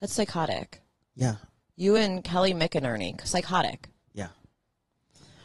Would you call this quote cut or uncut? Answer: uncut